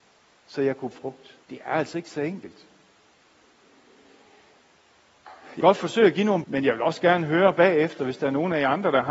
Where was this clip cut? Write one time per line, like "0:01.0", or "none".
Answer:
0:00.9
0:01.4
0:05.6
0:06.4